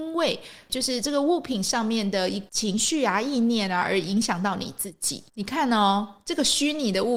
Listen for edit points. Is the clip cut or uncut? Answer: cut